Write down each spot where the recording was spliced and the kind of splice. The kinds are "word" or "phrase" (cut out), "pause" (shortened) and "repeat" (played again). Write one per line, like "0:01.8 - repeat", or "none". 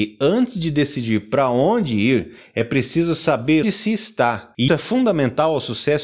0:03.6 - word
0:04.7 - word